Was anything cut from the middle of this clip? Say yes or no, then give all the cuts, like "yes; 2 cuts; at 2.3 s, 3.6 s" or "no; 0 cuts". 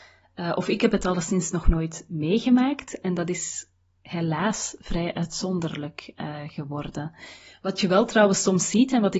no; 0 cuts